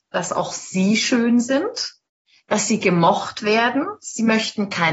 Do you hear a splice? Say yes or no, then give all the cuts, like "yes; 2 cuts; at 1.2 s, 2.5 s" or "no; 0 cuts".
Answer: no; 0 cuts